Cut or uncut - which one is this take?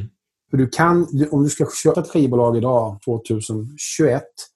cut